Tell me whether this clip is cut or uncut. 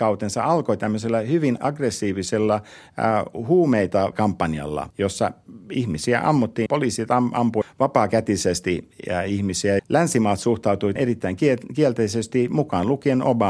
cut